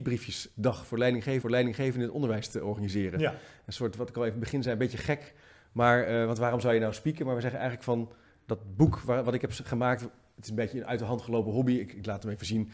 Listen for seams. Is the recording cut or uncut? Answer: cut